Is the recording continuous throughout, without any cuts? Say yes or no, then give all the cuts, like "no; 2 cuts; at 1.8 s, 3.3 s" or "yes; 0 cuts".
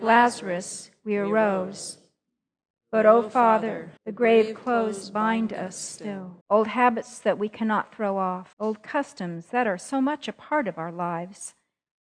no; 3 cuts; at 4.0 s, 6.4 s, 8.5 s